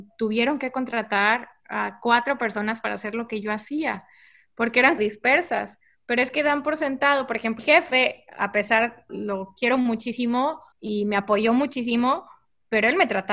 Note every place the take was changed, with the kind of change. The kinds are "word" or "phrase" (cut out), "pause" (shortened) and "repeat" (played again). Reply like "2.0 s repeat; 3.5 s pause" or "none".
5.0 s phrase; 7.6 s word; 9.1 s word; 10.7 s pause